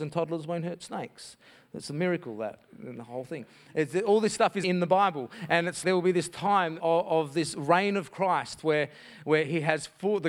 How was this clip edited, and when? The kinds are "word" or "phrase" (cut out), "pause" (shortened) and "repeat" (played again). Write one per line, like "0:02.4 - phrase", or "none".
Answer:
0:04.6 - word
0:05.8 - word
0:06.8 - word